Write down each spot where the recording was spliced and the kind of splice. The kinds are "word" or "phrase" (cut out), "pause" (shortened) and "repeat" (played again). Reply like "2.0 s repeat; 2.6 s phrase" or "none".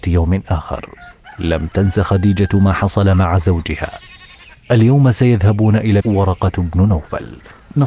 6.0 s phrase